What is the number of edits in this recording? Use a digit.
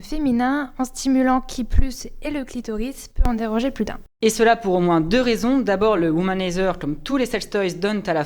0